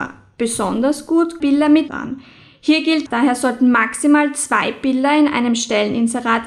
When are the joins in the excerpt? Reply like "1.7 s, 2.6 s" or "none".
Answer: 1.4 s, 1.9 s, 3.1 s

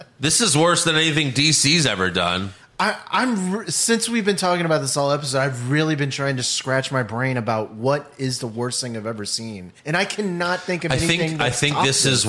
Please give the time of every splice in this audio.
9.8 s

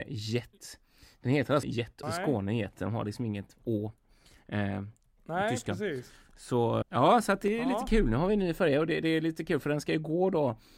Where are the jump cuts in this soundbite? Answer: 1.6 s, 2.0 s, 6.8 s

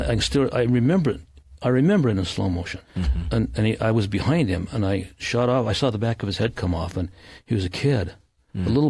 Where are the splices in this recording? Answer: 2.8 s

